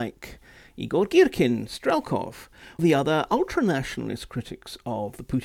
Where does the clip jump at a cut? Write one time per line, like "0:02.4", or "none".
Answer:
0:02.8